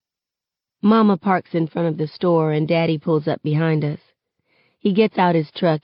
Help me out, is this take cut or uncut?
uncut